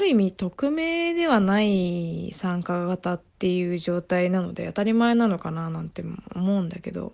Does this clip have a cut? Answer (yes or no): yes